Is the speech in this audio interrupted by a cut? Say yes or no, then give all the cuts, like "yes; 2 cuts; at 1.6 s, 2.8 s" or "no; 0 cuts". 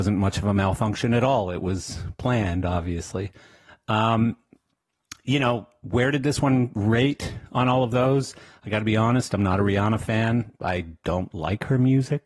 no; 0 cuts